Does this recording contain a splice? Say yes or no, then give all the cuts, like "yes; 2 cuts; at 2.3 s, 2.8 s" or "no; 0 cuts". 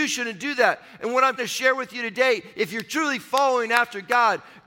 yes; 1 cut; at 1.4 s